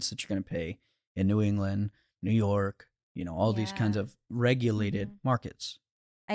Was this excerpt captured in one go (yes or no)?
yes